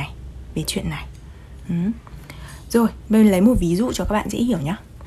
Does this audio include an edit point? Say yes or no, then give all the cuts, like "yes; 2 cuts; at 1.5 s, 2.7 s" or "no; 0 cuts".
no; 0 cuts